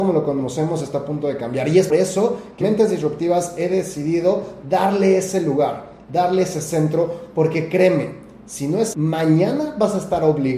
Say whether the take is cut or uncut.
cut